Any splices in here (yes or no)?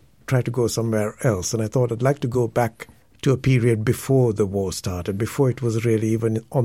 no